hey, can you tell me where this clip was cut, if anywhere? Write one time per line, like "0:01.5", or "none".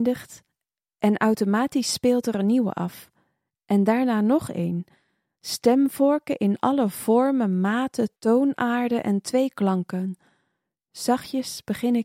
0:08.2